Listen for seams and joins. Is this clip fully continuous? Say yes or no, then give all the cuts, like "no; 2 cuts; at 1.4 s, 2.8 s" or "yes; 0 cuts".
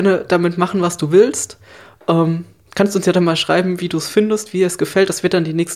yes; 0 cuts